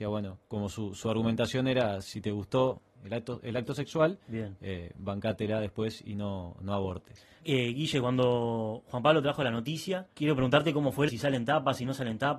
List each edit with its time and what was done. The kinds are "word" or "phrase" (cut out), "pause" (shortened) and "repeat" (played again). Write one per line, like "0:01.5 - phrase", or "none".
0:11.1 - phrase